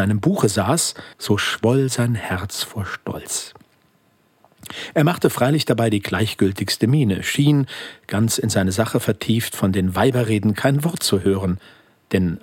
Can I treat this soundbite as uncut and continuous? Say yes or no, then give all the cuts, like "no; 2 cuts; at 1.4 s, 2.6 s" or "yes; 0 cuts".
no; 1 cut; at 1.1 s